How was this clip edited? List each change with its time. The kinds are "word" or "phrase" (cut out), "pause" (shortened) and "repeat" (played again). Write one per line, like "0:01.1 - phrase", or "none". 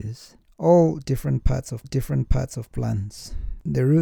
0:01.8 - repeat